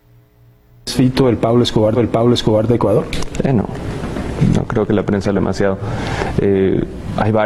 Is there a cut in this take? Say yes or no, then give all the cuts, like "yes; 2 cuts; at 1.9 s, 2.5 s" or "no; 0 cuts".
yes; 2 cuts; at 2.0 s, 5.4 s